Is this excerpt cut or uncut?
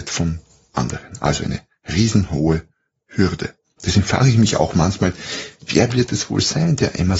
uncut